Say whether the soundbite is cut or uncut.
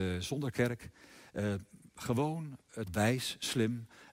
cut